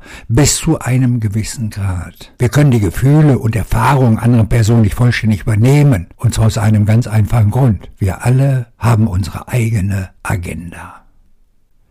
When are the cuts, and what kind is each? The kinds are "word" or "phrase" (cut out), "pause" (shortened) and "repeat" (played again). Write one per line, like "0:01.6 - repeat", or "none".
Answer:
0:02.4 - pause
0:04.2 - word
0:06.1 - pause
0:08.0 - pause
0:08.7 - pause
0:10.2 - pause